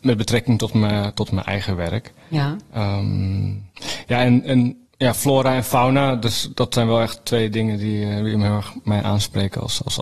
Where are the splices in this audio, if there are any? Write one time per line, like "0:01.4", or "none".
0:04.9